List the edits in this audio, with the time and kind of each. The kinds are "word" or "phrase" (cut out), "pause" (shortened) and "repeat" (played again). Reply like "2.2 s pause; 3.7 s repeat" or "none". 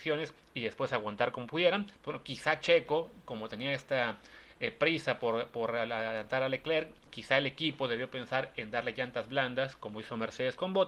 1.9 s pause